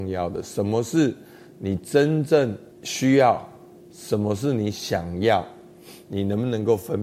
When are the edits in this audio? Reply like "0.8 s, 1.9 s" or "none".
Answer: 2.7 s, 3.8 s